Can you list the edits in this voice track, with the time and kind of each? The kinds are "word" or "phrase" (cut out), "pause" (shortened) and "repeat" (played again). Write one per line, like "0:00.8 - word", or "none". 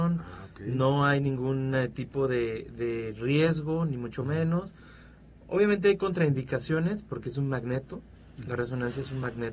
none